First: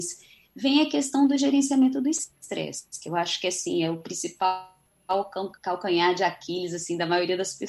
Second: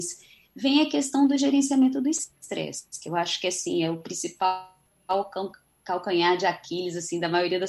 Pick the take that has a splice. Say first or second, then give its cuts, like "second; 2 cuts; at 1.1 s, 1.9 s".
first; 1 cut; at 5.6 s